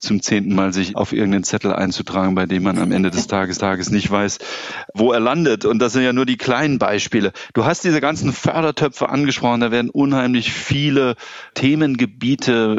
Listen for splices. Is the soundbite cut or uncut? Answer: cut